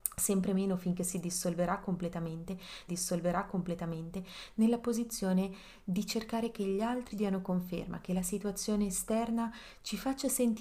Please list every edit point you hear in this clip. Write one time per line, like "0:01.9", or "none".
0:02.9
0:07.1